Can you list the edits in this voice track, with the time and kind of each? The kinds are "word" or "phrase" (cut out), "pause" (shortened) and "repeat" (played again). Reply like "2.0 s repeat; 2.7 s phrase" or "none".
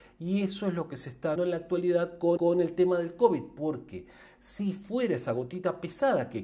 1.4 s word; 2.4 s repeat